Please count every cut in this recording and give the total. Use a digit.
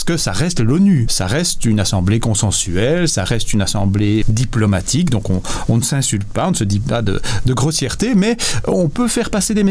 1